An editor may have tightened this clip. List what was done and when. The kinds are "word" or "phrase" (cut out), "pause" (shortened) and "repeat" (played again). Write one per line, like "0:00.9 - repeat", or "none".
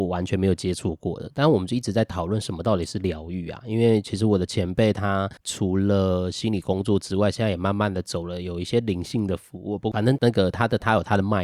none